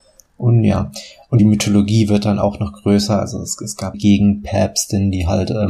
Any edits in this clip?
yes; 2 cuts; at 1.4 s, 3.9 s

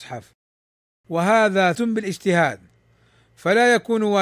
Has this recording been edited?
yes; 1 cut; at 1.7 s

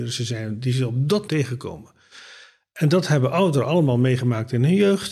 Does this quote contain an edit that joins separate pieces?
yes; 1 cut; at 1.3 s

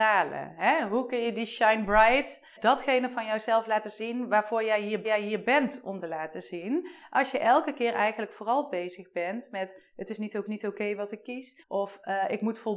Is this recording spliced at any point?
yes; 5 cuts; at 2.6 s, 5.0 s, 6.0 s, 10.5 s, 11.6 s

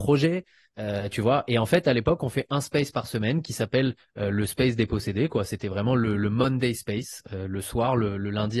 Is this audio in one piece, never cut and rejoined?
yes; 0 cuts

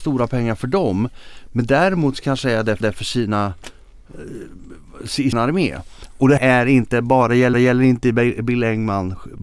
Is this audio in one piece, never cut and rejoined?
no; 4 cuts; at 2.8 s, 5.3 s, 6.4 s, 7.5 s

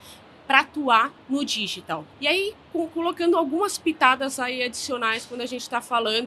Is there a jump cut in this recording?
yes; 2 cuts; at 1.2 s, 2.1 s

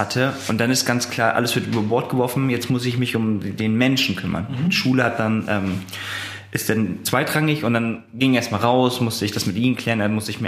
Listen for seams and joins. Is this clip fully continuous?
yes; 0 cuts

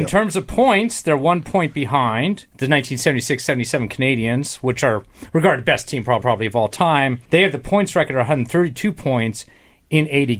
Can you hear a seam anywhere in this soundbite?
yes; 3 cuts; at 2.5 s, 6.2 s, 7.2 s

